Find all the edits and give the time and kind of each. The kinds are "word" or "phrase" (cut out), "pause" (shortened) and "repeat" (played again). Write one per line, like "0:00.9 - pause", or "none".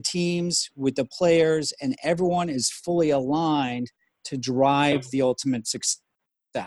none